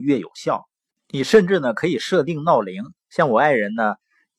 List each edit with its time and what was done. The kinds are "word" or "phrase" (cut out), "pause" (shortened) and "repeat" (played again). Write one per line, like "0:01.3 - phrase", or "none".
0:00.9 - pause